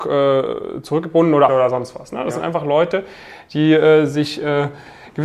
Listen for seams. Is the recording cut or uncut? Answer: cut